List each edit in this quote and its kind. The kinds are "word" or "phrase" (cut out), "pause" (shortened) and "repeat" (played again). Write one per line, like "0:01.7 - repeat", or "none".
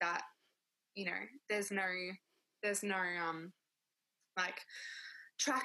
none